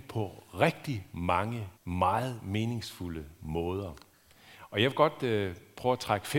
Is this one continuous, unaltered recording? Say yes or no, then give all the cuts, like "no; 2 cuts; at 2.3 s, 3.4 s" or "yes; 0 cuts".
no; 1 cut; at 1.8 s